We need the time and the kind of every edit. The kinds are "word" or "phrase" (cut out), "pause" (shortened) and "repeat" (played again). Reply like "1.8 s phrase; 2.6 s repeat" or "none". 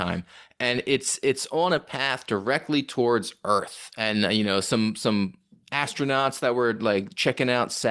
none